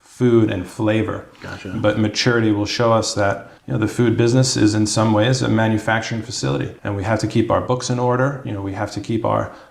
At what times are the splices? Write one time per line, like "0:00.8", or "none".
0:03.6
0:06.8